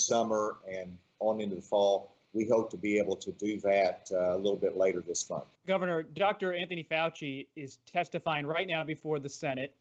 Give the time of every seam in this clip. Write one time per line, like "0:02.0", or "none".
0:05.6